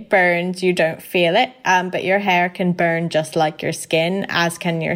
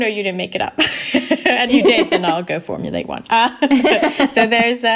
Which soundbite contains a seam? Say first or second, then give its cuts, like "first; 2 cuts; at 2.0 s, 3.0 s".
second; 1 cut; at 1.7 s